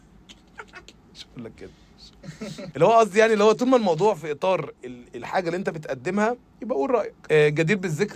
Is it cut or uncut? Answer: cut